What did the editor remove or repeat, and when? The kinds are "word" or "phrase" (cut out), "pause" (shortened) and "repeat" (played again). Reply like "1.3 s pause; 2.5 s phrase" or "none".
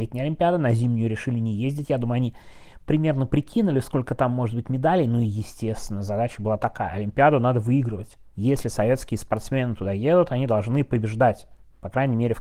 8.3 s pause